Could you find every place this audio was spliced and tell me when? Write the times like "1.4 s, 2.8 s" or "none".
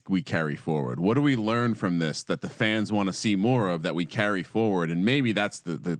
none